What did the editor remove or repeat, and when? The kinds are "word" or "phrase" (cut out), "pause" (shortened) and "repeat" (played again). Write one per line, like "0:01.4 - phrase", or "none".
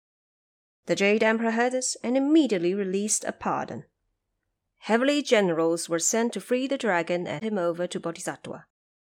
0:07.4 - word